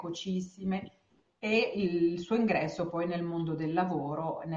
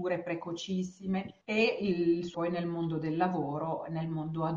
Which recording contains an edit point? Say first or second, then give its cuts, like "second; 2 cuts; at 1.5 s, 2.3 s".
second; 2 cuts; at 1.4 s, 2.3 s